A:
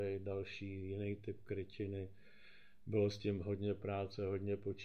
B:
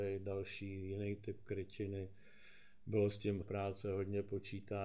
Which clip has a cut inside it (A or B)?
B